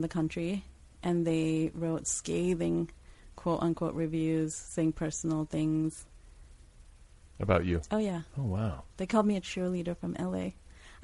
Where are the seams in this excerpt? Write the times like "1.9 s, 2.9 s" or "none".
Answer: 8.3 s, 8.9 s